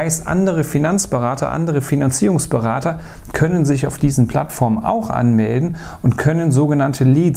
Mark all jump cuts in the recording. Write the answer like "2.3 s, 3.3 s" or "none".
none